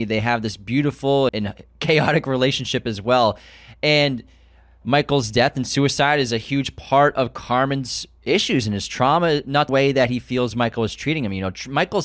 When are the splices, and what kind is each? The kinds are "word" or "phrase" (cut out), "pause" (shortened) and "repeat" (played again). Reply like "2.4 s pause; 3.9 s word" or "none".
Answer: 1.3 s word; 9.7 s phrase